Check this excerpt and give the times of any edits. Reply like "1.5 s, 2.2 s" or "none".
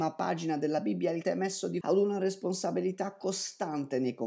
1.2 s, 1.8 s